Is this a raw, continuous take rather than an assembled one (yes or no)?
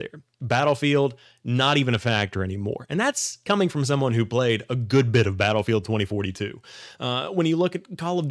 yes